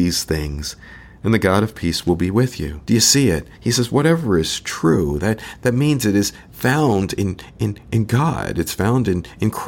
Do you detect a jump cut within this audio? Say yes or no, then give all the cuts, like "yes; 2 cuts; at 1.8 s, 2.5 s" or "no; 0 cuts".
yes; 2 cuts; at 2.8 s, 3.5 s